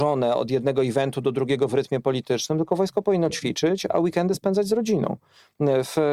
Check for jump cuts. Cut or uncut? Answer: uncut